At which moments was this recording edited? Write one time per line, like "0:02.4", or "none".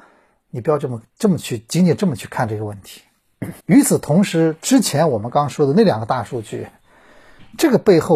0:03.6